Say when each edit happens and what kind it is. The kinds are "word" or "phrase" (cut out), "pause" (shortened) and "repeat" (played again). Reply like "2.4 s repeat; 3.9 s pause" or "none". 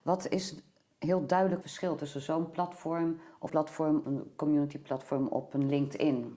1.6 s word; 3.5 s word; 4.0 s phrase